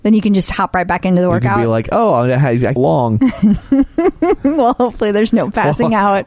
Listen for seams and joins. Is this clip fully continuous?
no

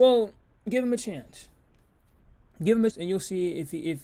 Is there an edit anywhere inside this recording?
yes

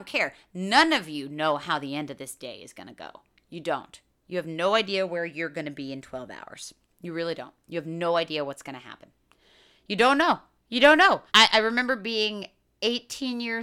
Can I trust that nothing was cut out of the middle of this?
no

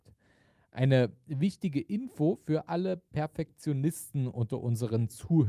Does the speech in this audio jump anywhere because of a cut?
no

